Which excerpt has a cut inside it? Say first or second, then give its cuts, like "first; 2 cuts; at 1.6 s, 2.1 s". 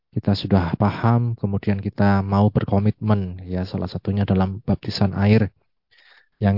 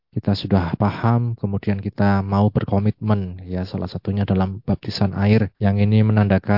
second; 1 cut; at 5.5 s